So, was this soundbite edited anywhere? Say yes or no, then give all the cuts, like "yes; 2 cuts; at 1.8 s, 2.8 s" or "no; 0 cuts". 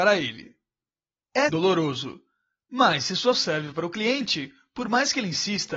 yes; 2 cuts; at 1.5 s, 3.3 s